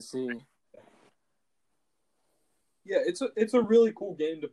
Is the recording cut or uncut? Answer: uncut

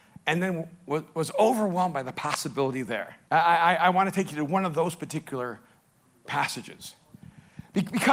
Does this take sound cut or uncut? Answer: cut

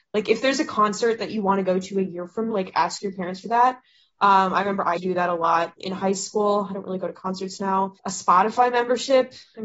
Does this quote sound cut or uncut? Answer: cut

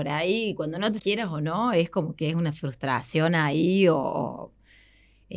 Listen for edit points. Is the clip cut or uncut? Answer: cut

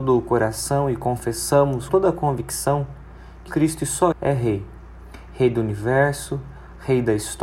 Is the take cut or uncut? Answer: cut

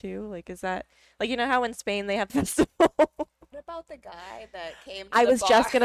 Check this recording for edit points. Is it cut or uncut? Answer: cut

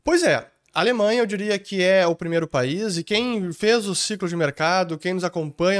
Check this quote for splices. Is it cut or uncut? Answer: uncut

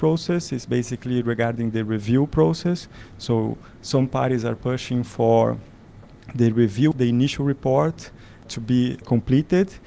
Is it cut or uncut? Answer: cut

